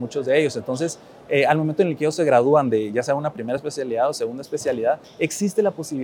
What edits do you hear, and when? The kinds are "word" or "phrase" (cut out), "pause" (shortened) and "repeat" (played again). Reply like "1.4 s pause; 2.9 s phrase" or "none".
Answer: none